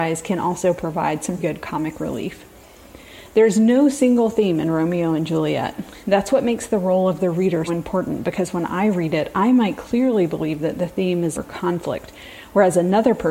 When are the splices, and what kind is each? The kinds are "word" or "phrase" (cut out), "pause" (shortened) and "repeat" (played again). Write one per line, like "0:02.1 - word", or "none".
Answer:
0:01.4 - word
0:07.7 - word
0:11.3 - word